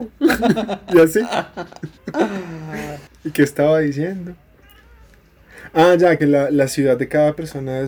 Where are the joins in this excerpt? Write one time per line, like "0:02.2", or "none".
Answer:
0:02.0
0:06.2